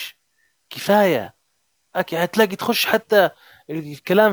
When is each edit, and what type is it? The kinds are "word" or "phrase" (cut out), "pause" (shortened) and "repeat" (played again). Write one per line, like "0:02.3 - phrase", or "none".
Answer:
none